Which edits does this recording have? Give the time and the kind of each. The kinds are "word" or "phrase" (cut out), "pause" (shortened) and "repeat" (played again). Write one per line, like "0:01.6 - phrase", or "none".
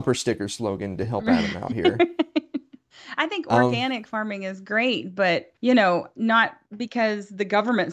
0:05.6 - pause
0:06.7 - pause

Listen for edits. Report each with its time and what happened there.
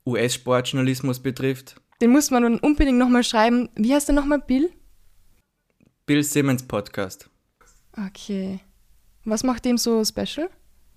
0:01.9 - pause

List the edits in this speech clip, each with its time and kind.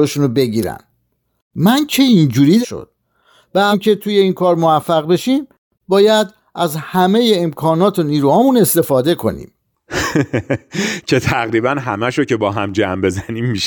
0:02.6 - word
0:03.7 - phrase

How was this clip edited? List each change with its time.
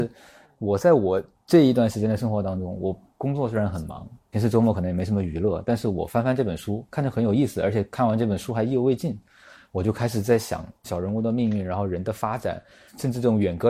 none

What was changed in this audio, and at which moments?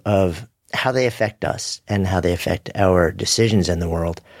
none

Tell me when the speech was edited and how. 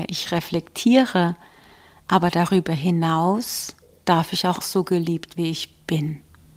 0:04.6 - word
0:05.4 - word

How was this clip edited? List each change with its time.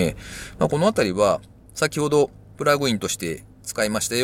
none

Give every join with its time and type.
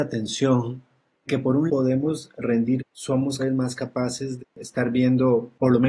0:01.3 - word
0:01.7 - word
0:02.8 - word
0:03.4 - word
0:04.4 - word

